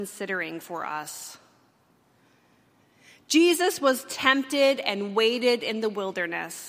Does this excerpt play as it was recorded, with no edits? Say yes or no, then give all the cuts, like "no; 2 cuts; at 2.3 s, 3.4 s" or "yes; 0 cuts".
yes; 0 cuts